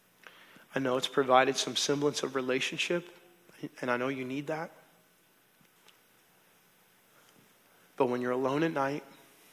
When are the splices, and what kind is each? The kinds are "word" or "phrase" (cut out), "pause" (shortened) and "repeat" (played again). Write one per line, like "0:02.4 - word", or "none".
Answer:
none